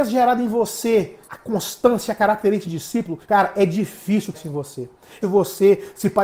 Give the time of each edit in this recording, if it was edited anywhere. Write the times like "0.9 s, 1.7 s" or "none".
1.2 s, 2.6 s, 3.2 s, 4.3 s, 5.2 s